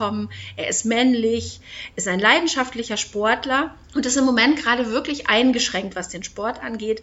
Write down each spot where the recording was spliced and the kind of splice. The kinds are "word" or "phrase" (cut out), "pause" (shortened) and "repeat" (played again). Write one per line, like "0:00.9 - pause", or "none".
0:03.8 - pause